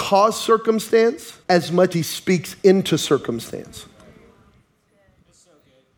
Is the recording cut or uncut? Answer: cut